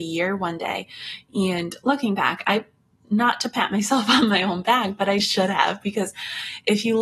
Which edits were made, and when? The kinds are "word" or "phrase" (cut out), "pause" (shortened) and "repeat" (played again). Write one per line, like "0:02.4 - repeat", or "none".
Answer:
0:05.2 - word